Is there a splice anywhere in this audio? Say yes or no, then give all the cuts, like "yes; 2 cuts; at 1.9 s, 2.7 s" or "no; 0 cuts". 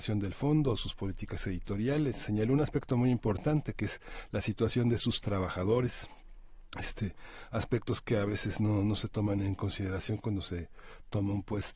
no; 0 cuts